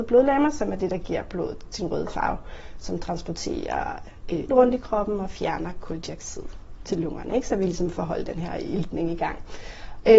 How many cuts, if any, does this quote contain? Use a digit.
2